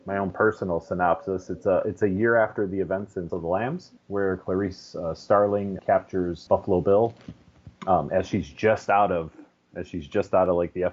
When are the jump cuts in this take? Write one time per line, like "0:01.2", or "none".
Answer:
0:03.3
0:04.0
0:05.8
0:06.5
0:07.8